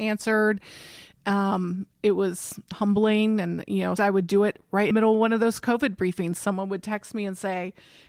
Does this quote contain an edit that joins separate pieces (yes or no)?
yes